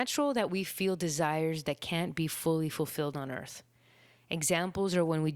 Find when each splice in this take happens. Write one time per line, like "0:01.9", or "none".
none